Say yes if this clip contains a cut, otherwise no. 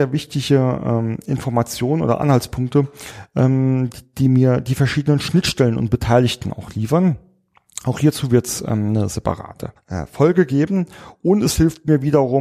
yes